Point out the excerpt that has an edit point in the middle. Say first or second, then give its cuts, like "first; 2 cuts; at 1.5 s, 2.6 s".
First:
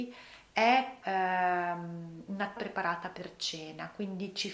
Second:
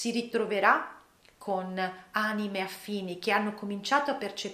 first; 2 cuts; at 1.0 s, 2.6 s